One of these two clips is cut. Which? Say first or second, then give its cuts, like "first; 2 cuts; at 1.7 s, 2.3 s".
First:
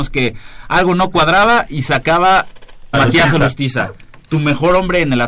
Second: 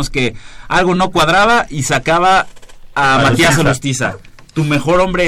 first; 1 cut; at 2.9 s